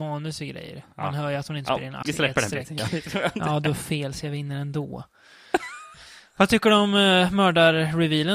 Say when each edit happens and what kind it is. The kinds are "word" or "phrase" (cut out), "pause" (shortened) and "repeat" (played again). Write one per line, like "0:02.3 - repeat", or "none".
0:02.0 - word